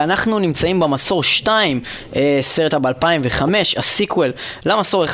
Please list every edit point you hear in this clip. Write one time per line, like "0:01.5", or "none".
0:02.7